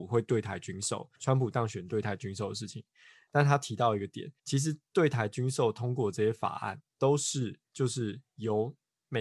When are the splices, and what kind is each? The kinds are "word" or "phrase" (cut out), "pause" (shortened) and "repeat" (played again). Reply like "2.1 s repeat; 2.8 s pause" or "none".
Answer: 1.1 s pause; 4.4 s pause; 6.9 s word; 7.6 s pause